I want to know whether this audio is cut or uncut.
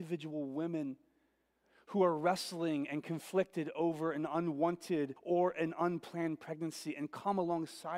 cut